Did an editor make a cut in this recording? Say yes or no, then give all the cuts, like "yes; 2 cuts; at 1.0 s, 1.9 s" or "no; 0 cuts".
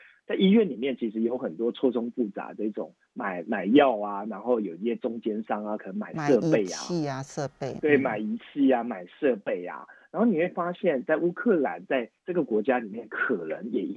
yes; 1 cut; at 12.2 s